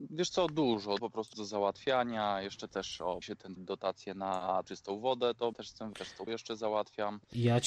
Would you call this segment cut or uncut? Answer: cut